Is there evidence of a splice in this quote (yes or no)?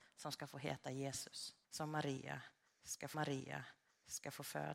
yes